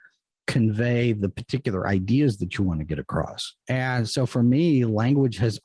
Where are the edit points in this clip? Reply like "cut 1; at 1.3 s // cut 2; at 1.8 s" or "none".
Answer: cut 1; at 3.6 s